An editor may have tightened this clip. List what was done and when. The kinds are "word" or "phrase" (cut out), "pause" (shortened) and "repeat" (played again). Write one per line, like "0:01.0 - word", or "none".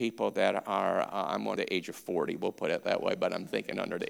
0:01.6 - phrase